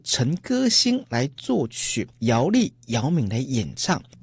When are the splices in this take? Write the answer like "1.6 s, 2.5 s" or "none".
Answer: 2.1 s